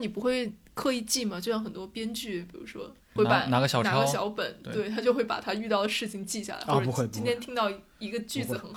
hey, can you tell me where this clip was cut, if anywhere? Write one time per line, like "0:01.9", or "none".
0:03.2